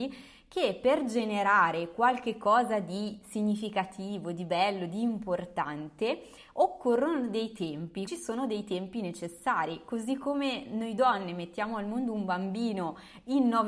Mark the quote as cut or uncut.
cut